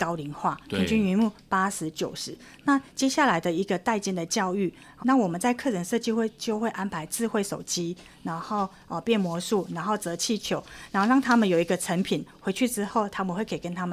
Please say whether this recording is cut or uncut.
cut